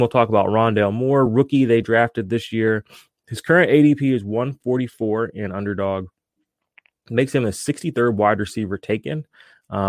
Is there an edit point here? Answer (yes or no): no